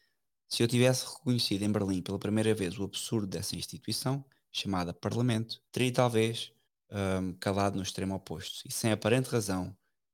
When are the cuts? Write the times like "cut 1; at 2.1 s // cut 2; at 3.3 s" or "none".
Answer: cut 1; at 5.7 s // cut 2; at 6.7 s